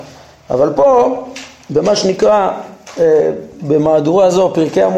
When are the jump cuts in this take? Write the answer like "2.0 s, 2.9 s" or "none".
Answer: none

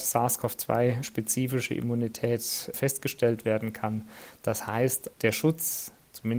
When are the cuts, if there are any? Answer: 2.7 s, 5.1 s

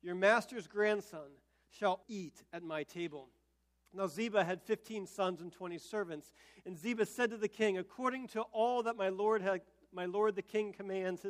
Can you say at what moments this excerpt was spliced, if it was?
2.0 s

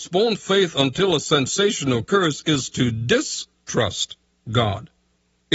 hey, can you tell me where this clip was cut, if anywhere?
none

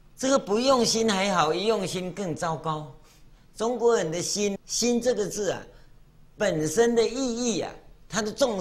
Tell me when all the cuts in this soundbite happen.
4.6 s

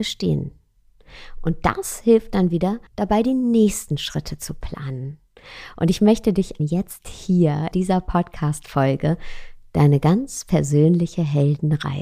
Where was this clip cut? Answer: 2.9 s, 6.6 s, 7.7 s

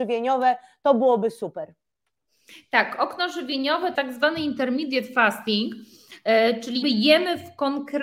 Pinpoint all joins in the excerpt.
3.9 s, 6.8 s

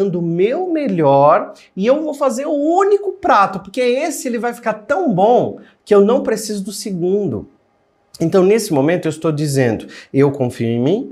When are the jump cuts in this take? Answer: none

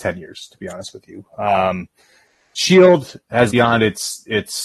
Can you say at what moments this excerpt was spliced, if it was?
3.5 s

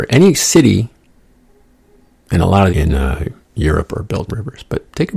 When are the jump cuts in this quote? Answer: 2.7 s, 4.3 s

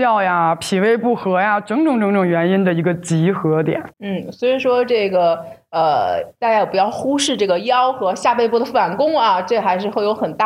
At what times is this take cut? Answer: 3.9 s

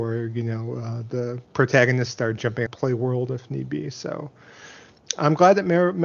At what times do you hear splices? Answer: 2.7 s

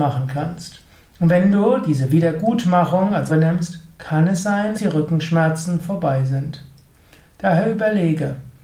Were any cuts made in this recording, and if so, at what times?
3.3 s, 4.7 s

